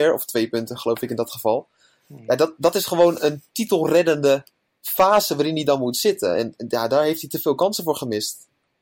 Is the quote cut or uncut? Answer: uncut